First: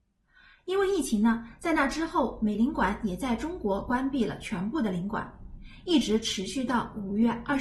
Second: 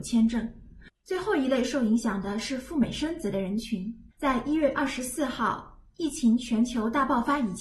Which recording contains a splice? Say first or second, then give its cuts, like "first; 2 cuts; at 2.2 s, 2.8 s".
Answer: second; 2 cuts; at 0.9 s, 4.1 s